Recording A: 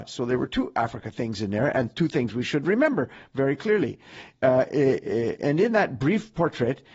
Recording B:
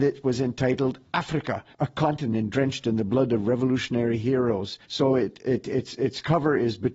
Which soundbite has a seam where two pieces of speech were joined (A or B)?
B